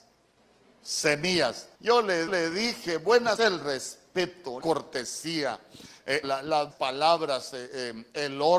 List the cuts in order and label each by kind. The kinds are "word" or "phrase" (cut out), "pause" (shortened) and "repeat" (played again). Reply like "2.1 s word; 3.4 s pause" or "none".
1.7 s pause; 2.3 s repeat; 3.4 s word; 4.6 s word; 6.2 s word; 6.7 s word